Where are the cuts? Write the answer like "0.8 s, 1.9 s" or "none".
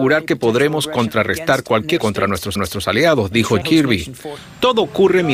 2.0 s, 2.6 s, 3.6 s